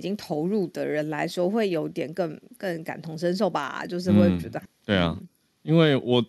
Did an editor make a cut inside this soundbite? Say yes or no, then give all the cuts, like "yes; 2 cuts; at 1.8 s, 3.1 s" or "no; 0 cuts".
yes; 1 cut; at 4.6 s